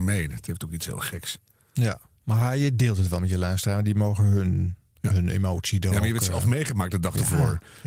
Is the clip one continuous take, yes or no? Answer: yes